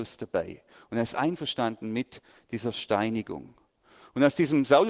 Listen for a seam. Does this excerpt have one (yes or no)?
no